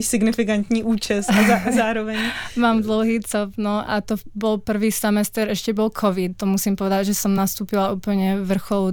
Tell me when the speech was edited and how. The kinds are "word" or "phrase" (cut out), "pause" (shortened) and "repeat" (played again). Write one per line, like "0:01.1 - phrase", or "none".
none